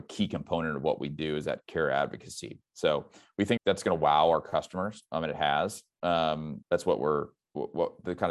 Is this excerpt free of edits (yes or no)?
no